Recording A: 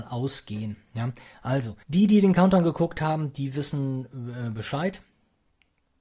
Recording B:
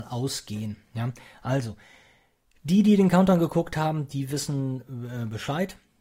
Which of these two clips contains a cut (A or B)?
A